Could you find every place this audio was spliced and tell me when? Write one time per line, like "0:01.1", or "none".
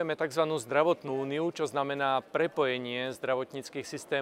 none